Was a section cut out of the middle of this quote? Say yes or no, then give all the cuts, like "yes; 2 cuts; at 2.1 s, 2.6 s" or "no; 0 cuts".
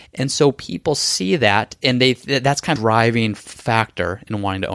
yes; 1 cut; at 2.8 s